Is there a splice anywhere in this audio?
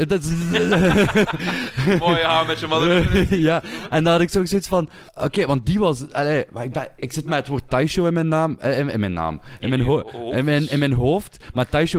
yes; 1 cut; at 5.1 s

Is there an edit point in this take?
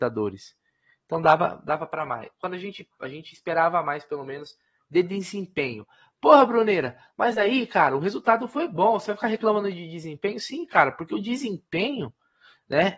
no; 0 cuts

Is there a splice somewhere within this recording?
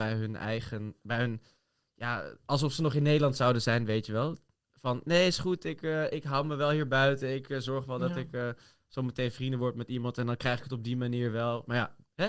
no; 0 cuts

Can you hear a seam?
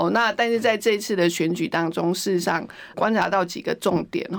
yes; 1 cut; at 2.9 s

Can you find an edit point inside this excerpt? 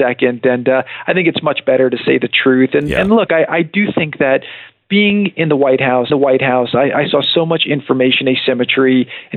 yes; 1 cut; at 6.1 s

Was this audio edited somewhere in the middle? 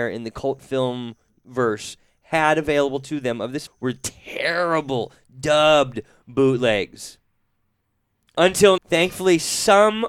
yes; 2 cuts; at 3.7 s, 8.8 s

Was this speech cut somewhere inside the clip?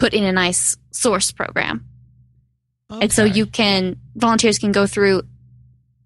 no; 0 cuts

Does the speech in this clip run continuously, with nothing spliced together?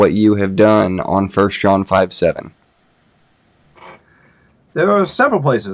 yes; 0 cuts

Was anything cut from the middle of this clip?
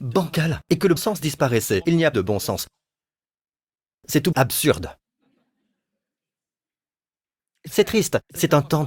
yes; 3 cuts; at 1.0 s, 2.1 s, 4.3 s

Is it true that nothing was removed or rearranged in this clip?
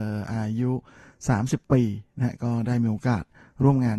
yes; 0 cuts

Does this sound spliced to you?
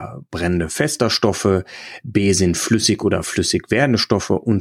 no; 0 cuts

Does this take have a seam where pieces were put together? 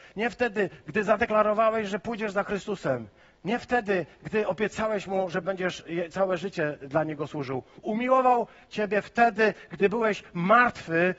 no; 0 cuts

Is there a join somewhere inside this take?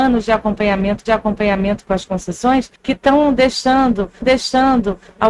yes; 3 cuts; at 1.1 s, 2.8 s, 4.2 s

